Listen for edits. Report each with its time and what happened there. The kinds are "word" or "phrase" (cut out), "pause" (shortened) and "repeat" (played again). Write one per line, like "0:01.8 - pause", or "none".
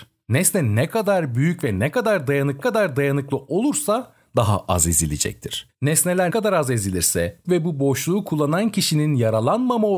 0:02.6 - repeat
0:06.3 - word
0:07.4 - word